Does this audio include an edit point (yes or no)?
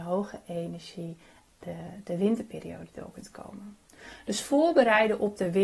no